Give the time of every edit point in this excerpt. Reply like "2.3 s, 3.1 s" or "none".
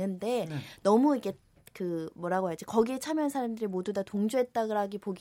none